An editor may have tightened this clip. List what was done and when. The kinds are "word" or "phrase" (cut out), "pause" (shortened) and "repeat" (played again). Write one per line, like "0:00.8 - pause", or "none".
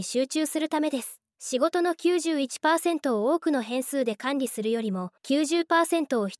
0:01.3 - pause
0:05.2 - pause